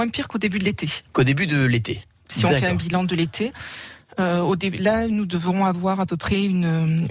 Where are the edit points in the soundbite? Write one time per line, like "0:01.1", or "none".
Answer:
0:01.1